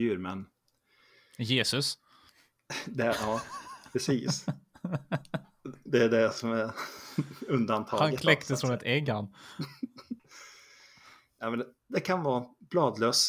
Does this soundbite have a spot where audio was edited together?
yes; 1 cut; at 10.2 s

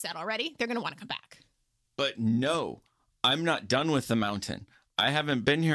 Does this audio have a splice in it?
no; 0 cuts

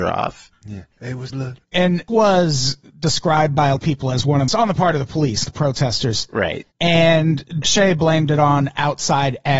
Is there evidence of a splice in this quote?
yes; 6 cuts; at 1.3 s, 2.1 s, 3.8 s, 4.5 s, 5.4 s, 7.6 s

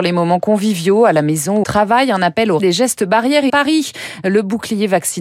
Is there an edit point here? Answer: yes; 3 cuts; at 1.6 s, 2.6 s, 3.5 s

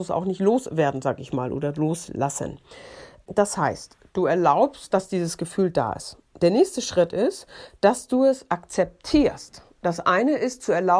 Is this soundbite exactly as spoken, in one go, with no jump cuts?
yes; 0 cuts

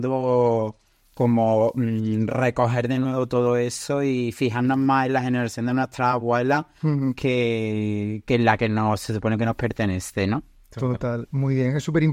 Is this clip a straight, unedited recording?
yes; 0 cuts

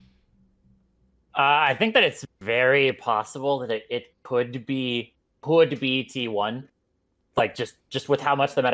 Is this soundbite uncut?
yes; 0 cuts

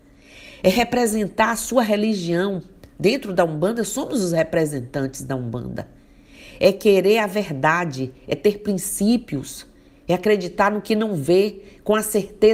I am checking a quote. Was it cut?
no; 0 cuts

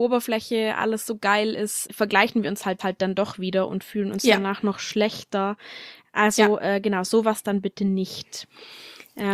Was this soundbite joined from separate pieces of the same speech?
yes; 2 cuts; at 1.9 s, 2.8 s

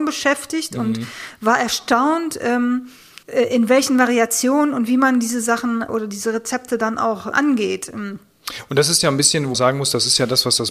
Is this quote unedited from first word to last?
no; 4 cuts; at 3.2 s, 5.9 s, 7.3 s, 9.5 s

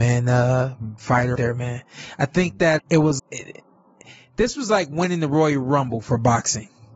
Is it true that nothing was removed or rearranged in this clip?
no; 4 cuts; at 1.0 s, 1.3 s, 2.8 s, 3.2 s

